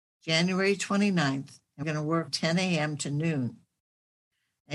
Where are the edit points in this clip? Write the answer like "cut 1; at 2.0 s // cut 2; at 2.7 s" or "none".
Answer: cut 1; at 1.8 s // cut 2; at 2.3 s